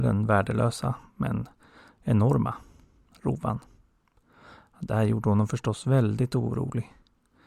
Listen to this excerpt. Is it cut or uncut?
uncut